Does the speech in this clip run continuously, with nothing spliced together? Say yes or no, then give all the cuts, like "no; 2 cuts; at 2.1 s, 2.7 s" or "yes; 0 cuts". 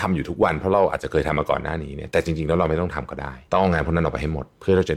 no; 1 cut; at 3.5 s